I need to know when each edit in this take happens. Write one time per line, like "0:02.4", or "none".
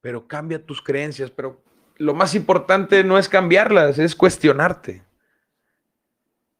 none